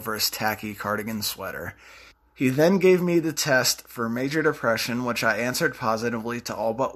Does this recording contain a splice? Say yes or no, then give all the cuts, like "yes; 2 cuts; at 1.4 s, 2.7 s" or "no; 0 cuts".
yes; 1 cut; at 2.1 s